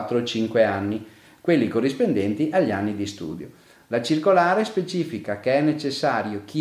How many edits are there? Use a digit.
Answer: 0